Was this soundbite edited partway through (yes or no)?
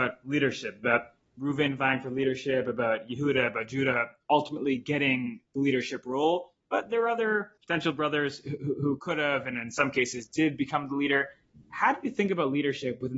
yes